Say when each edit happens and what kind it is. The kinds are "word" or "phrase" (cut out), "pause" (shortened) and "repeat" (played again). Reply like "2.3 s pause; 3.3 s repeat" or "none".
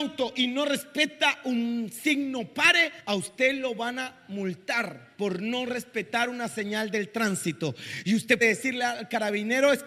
3.0 s pause; 8.4 s word